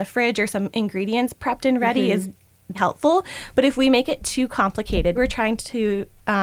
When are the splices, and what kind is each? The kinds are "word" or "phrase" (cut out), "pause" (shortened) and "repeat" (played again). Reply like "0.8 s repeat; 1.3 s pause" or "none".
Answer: 2.7 s word; 5.1 s word